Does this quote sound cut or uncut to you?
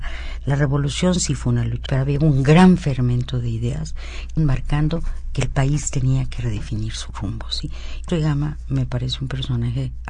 cut